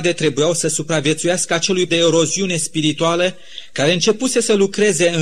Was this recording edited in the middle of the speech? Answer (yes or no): yes